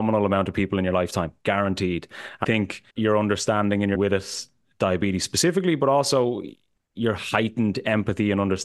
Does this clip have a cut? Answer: yes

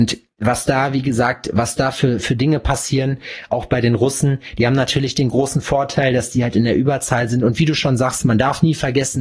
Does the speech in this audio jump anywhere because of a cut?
no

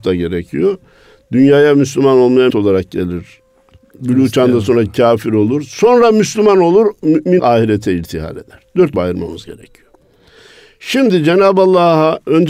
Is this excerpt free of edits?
no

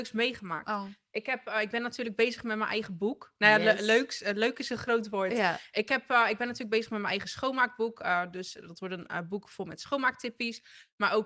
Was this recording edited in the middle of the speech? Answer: no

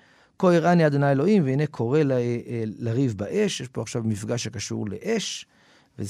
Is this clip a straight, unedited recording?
yes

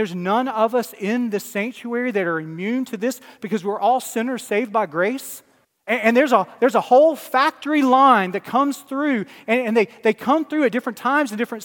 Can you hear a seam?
yes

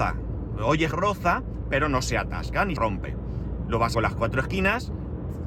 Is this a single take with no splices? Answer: no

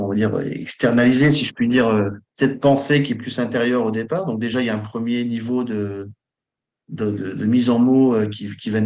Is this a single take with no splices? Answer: no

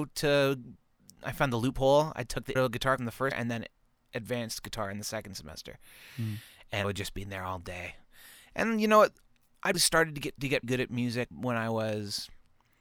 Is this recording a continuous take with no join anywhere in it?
no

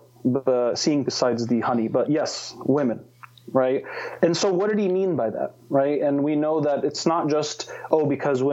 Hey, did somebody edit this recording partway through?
yes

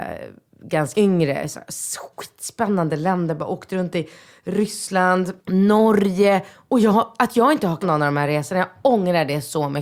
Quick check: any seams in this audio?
yes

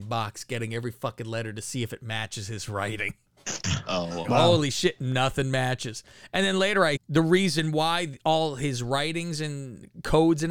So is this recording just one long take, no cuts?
no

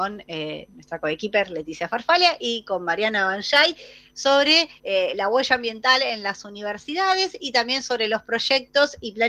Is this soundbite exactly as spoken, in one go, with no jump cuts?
no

